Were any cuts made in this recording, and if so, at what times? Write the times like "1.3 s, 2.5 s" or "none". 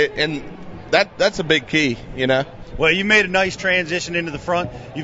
none